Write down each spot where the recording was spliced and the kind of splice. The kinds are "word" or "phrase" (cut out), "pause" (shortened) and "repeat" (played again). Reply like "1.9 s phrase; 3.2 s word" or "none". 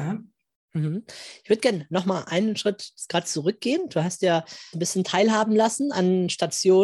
4.7 s word